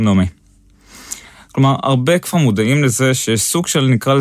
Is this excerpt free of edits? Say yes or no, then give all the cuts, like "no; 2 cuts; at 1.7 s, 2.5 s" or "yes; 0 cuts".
yes; 0 cuts